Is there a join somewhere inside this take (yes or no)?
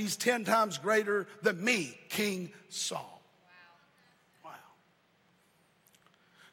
no